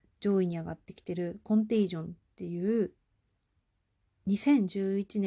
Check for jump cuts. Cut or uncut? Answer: uncut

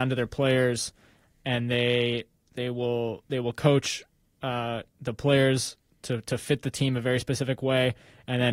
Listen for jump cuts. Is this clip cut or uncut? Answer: uncut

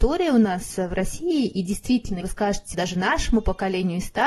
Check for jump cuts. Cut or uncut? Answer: cut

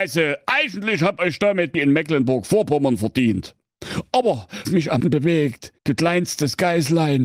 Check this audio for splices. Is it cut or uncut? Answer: cut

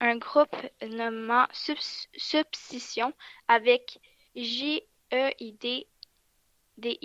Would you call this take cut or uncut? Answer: uncut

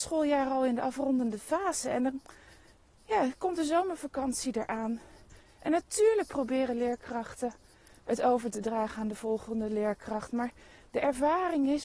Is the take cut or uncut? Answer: uncut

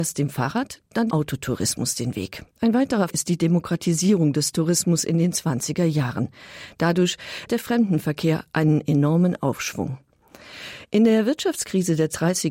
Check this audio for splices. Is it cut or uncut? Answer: cut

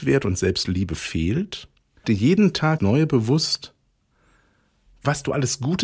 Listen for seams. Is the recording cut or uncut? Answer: cut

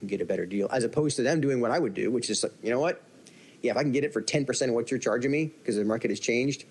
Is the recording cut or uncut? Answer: uncut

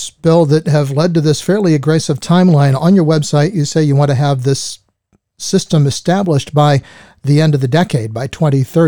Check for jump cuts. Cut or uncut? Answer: uncut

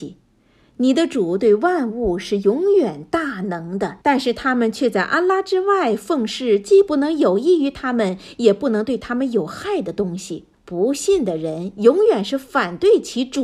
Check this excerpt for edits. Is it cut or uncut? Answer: cut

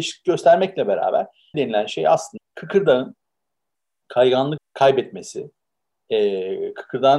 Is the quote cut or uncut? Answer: cut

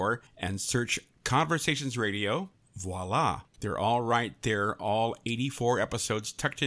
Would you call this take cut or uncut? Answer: cut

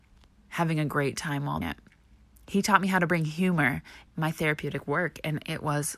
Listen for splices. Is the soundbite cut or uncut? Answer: cut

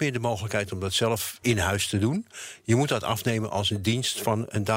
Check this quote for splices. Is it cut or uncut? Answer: cut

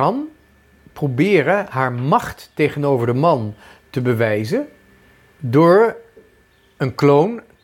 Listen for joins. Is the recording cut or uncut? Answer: uncut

